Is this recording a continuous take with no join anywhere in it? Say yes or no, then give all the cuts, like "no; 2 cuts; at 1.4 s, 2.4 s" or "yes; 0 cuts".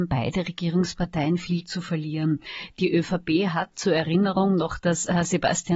yes; 0 cuts